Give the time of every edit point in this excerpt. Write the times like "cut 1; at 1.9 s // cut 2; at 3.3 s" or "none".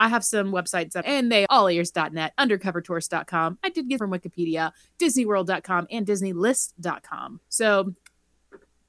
cut 1; at 1.0 s // cut 2; at 1.5 s // cut 3; at 4.0 s // cut 4; at 7.4 s